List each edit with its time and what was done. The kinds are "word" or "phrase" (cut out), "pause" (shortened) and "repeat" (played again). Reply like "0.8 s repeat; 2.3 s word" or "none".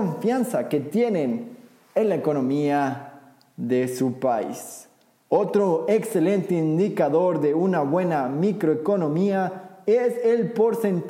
none